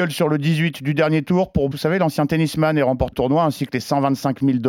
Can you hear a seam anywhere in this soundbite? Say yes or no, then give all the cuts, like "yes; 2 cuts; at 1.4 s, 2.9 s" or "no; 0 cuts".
yes; 2 cuts; at 1.7 s, 3.1 s